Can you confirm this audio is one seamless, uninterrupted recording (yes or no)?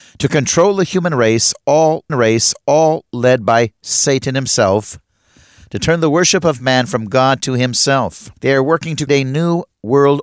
no